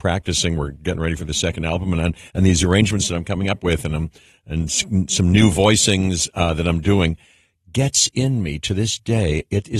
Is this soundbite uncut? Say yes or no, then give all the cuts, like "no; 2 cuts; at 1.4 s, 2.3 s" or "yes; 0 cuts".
yes; 0 cuts